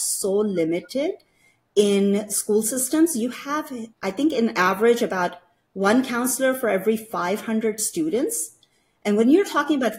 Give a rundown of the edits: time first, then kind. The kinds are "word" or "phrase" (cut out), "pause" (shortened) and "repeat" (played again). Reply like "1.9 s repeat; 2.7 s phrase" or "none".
3.9 s pause